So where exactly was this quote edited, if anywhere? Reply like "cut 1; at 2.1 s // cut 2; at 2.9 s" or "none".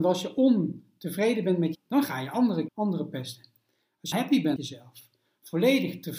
cut 1; at 1.7 s // cut 2; at 2.7 s // cut 3; at 4.1 s // cut 4; at 4.6 s